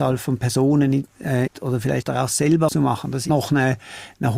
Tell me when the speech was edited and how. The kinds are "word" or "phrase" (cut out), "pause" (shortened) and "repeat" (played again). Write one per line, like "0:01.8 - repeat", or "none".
0:01.5 - word
0:02.0 - word
0:02.7 - word
0:03.3 - word